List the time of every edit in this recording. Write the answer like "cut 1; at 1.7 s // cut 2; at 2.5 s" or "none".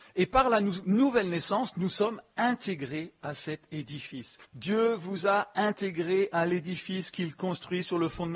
cut 1; at 4.4 s